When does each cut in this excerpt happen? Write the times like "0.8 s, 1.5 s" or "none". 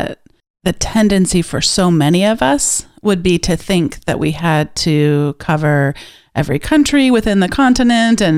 none